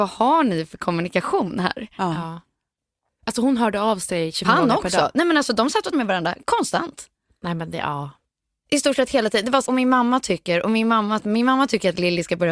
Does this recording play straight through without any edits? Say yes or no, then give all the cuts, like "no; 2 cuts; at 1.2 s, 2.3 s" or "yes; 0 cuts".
no; 4 cuts; at 4.4 s, 5.9 s, 9.7 s, 11.2 s